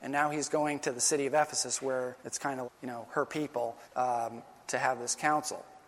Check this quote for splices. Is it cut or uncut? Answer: cut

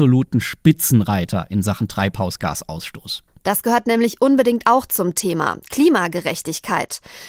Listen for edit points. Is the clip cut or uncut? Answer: uncut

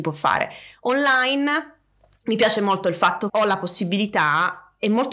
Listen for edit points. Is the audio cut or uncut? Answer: cut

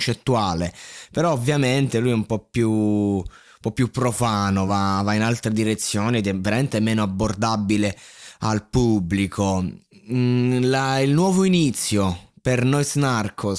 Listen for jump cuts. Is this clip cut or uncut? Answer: uncut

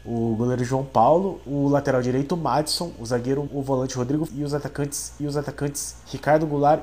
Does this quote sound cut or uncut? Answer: cut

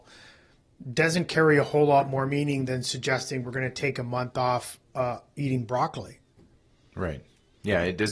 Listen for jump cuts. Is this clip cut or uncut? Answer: uncut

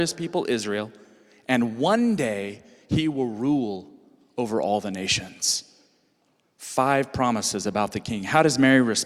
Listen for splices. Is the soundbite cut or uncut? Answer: uncut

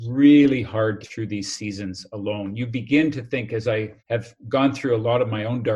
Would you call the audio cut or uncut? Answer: cut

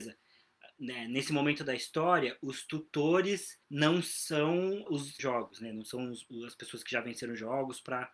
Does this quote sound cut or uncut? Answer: cut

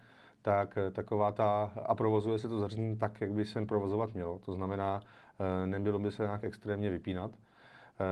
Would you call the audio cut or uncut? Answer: uncut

